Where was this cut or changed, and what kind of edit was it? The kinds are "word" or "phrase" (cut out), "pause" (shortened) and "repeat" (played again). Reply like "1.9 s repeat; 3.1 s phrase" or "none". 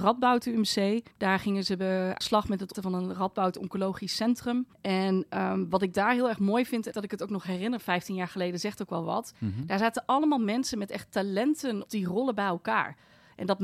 1.1 s pause; 2.2 s word; 2.7 s word; 4.7 s pause; 6.9 s phrase; 9.4 s pause; 11.9 s word